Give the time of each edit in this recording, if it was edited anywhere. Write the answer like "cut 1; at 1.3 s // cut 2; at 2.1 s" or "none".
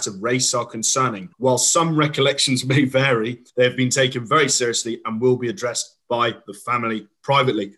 cut 1; at 1.3 s // cut 2; at 3.5 s

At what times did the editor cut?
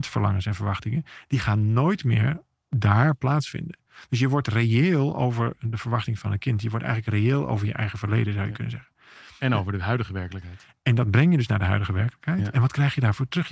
cut 1; at 2.6 s // cut 2; at 9.4 s

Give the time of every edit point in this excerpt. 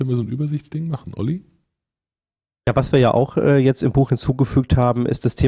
none

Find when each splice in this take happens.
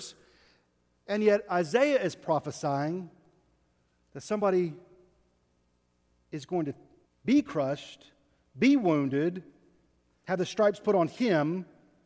cut 1; at 7.0 s

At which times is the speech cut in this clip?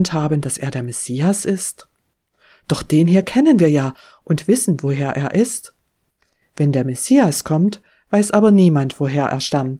none

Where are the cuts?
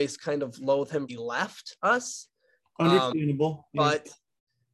cut 1; at 1.1 s

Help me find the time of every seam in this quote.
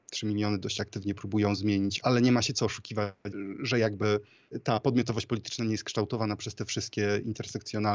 none

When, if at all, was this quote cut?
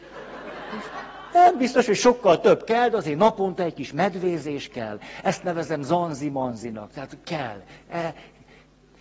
none

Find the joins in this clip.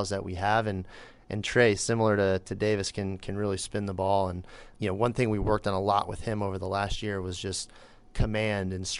none

